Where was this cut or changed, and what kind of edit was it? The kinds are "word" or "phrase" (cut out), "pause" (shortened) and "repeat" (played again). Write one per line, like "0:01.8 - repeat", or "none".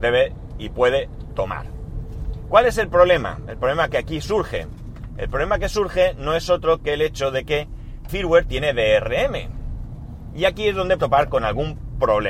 0:08.1 - word
0:11.0 - word